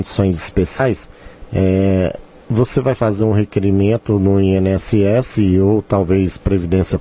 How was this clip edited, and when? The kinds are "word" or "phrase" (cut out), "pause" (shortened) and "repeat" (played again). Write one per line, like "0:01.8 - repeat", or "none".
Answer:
none